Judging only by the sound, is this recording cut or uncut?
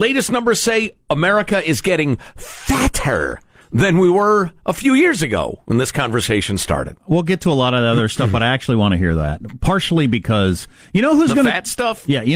uncut